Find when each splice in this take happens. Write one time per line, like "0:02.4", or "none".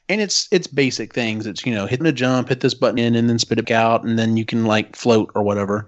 0:02.0
0:03.0
0:03.6